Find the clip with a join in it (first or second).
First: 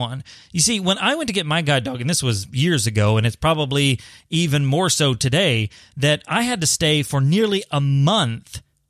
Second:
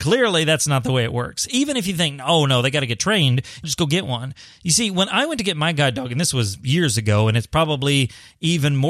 second